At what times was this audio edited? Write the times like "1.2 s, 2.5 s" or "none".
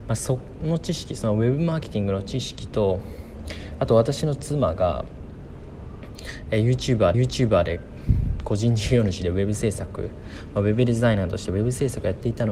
7.1 s